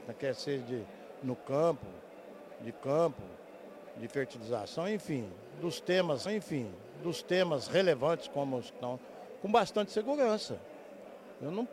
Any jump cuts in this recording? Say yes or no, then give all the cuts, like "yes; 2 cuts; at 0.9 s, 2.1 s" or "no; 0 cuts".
yes; 2 cuts; at 2.7 s, 6.3 s